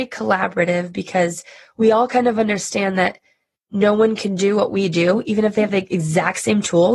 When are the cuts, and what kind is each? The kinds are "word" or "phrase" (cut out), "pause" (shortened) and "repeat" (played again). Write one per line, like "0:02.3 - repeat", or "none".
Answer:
none